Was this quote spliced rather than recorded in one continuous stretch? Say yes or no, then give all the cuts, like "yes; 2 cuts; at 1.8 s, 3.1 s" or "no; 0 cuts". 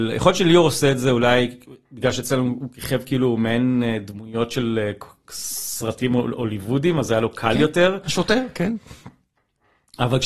no; 0 cuts